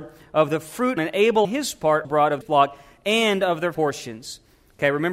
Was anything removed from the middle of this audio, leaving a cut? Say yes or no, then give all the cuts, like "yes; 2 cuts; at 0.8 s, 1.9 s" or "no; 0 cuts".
yes; 5 cuts; at 1.0 s, 1.4 s, 2.0 s, 2.4 s, 3.7 s